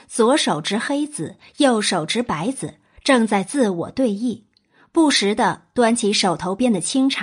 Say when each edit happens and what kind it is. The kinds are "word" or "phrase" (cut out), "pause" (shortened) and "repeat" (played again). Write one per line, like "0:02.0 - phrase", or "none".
none